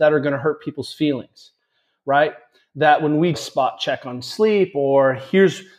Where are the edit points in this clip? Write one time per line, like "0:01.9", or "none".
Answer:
0:03.3

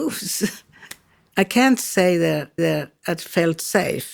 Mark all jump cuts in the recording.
0:02.6

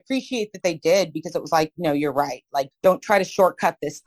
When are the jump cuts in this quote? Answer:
0:02.7

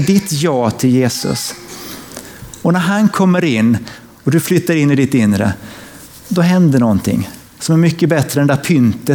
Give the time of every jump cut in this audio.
none

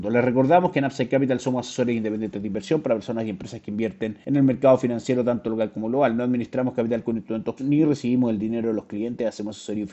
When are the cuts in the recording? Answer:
0:07.6

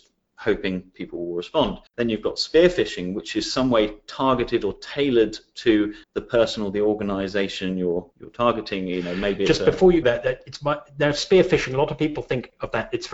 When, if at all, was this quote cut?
0:01.9
0:06.0
0:08.1
0:10.0

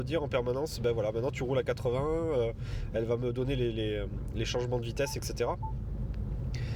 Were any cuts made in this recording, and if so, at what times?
none

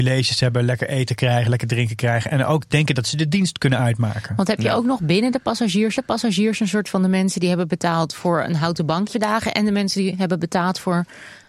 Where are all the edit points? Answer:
0:06.0
0:09.1

